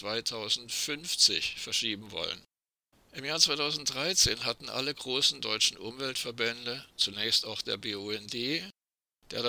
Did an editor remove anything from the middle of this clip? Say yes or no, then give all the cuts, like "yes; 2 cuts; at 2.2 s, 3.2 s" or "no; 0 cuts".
yes; 1 cut; at 2.9 s